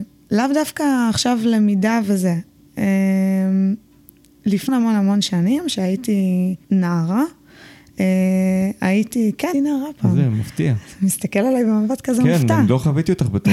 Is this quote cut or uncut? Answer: cut